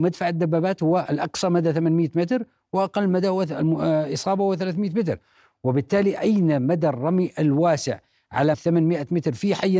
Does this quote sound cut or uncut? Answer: cut